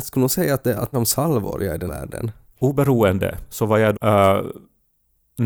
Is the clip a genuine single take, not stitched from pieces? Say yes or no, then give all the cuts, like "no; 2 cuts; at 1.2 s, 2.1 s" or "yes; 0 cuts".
no; 3 cuts; at 0.9 s, 1.9 s, 3.9 s